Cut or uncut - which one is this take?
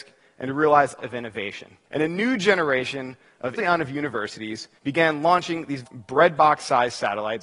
cut